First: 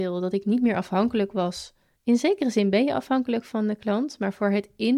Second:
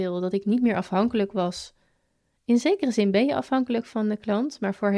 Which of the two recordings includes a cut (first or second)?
first